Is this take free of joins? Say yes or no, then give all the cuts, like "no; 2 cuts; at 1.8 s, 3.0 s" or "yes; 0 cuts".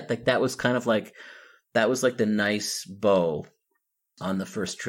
yes; 0 cuts